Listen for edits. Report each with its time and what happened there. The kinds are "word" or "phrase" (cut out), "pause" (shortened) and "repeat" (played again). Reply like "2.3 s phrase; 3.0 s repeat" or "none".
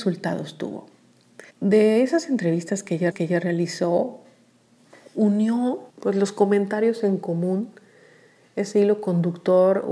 1.5 s pause; 3.1 s repeat; 5.9 s pause